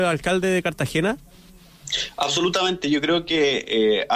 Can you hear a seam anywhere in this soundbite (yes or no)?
no